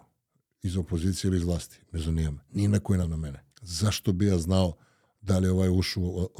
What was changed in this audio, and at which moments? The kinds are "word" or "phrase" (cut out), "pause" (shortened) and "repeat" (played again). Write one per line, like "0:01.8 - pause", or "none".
0:02.5 - pause
0:03.0 - phrase
0:03.5 - pause